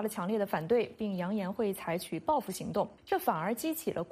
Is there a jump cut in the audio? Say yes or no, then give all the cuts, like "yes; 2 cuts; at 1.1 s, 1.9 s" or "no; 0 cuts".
yes; 1 cut; at 3.0 s